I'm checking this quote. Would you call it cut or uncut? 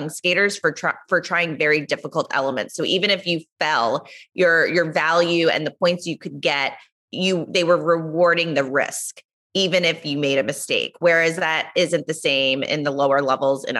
uncut